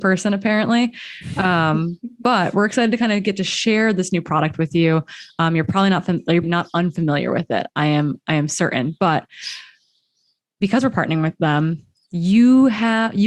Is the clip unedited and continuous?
no; 1 cut; at 6.4 s

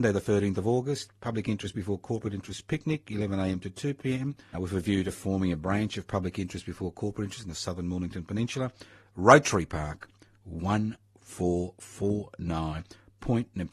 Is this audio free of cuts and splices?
no; 1 cut; at 4.5 s

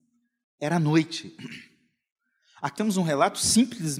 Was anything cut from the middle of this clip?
yes; 1 cut; at 2.8 s

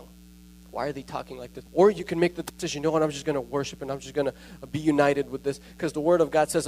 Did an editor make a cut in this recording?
yes; 1 cut; at 1.7 s

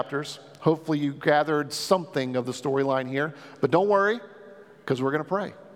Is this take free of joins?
yes; 0 cuts

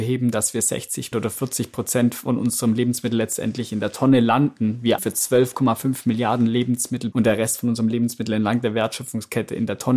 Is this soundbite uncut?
no; 3 cuts; at 1.1 s, 5.0 s, 7.1 s

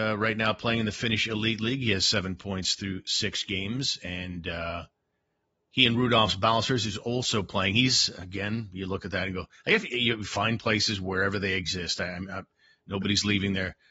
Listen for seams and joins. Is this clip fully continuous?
yes; 0 cuts

